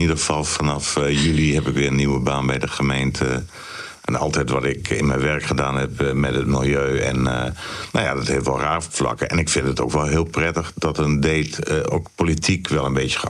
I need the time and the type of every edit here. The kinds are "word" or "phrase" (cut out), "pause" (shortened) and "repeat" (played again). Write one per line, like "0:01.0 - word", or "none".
none

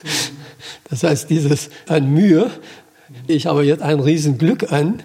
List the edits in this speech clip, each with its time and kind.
0:01.9 - word
0:03.3 - word
0:03.8 - word

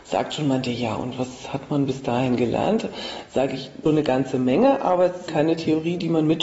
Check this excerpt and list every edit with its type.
0:03.9 - word
0:05.3 - word

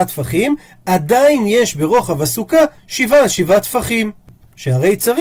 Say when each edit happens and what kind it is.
none

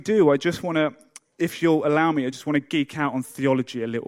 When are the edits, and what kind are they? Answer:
none

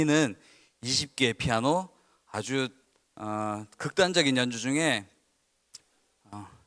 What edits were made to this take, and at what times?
none

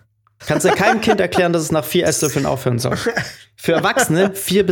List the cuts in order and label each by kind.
none

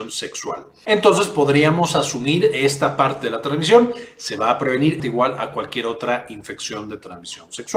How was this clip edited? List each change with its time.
0:05.0 - word

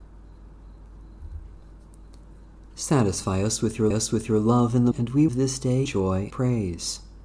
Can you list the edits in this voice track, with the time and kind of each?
0:02.7 - pause
0:03.9 - repeat
0:04.9 - word
0:05.3 - phrase
0:05.9 - word
0:06.3 - word

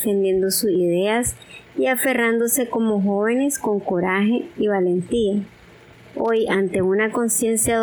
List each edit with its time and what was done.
none

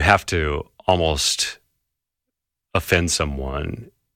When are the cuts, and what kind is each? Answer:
none

